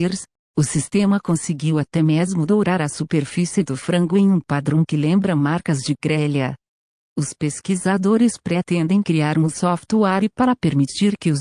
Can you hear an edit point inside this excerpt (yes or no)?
no